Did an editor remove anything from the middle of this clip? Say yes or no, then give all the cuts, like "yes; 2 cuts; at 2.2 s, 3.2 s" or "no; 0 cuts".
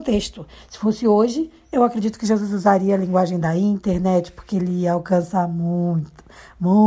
no; 0 cuts